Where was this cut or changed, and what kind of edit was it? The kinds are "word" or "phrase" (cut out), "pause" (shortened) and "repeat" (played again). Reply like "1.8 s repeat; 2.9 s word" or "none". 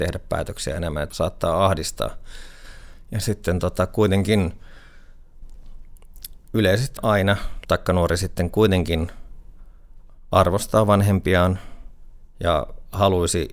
1.1 s word; 3.2 s word; 7.0 s word; 7.6 s word